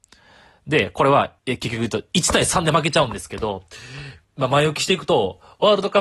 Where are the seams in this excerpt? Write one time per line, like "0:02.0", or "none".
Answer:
0:01.4
0:04.2